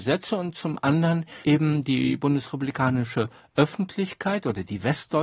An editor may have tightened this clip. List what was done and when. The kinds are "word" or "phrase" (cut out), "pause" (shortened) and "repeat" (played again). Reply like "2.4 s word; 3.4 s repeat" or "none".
1.4 s pause